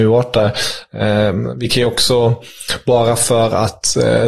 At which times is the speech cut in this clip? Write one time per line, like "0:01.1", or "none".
none